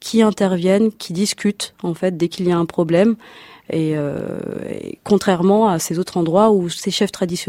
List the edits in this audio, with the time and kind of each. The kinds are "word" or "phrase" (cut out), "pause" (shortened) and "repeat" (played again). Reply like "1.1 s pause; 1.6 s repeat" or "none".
none